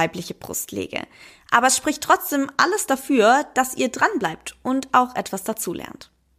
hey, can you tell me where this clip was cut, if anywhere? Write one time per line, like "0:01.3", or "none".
none